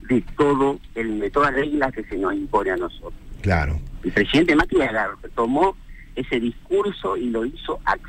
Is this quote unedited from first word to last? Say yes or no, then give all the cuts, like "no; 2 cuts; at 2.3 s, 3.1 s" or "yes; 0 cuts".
no; 2 cuts; at 1.2 s, 1.5 s